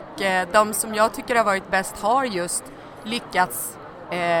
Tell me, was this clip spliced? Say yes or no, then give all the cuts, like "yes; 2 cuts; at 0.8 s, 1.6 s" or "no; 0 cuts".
no; 0 cuts